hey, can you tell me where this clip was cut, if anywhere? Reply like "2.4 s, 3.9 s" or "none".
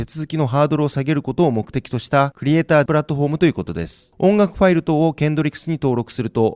2.9 s